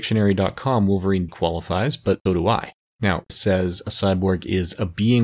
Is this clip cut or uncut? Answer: cut